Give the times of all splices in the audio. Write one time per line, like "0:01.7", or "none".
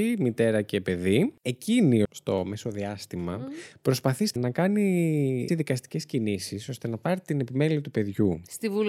0:02.0
0:04.4
0:05.5